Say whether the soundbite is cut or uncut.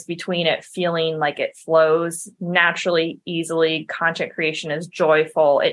uncut